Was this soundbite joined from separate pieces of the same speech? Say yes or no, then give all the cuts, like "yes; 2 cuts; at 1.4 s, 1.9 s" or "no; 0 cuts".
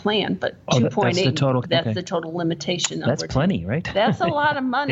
yes; 1 cut; at 1.6 s